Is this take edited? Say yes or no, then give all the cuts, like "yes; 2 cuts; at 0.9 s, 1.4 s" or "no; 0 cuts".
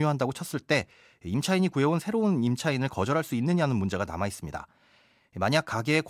no; 0 cuts